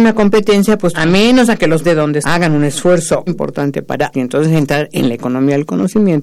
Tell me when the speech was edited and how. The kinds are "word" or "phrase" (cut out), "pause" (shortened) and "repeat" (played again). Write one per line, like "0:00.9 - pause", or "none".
0:00.9 - word
0:01.8 - word
0:02.2 - word
0:03.3 - word
0:04.1 - word